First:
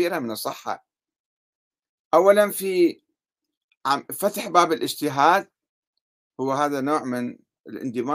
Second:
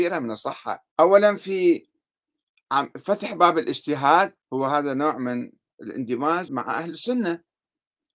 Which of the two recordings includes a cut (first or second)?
second